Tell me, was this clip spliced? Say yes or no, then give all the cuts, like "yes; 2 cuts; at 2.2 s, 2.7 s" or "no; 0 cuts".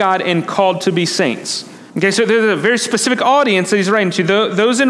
yes; 1 cut; at 1.9 s